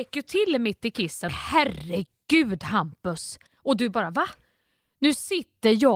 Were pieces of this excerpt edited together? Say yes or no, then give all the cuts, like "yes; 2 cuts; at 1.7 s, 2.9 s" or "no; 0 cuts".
yes; 2 cuts; at 1.3 s, 3.5 s